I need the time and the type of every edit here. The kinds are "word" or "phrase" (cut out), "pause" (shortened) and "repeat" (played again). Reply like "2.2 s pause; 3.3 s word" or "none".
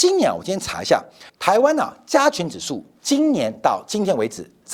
1.3 s pause

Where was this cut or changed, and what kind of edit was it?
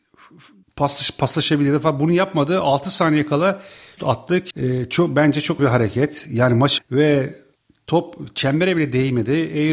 4.0 s word; 4.5 s word; 5.6 s word; 6.8 s word

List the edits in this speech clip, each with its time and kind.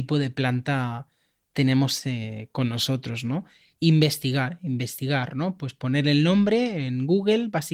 none

